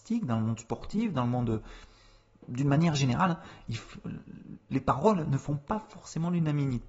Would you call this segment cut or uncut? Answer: uncut